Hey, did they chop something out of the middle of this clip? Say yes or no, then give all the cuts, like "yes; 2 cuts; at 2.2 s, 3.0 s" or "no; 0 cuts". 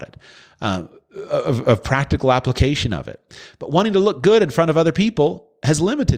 no; 0 cuts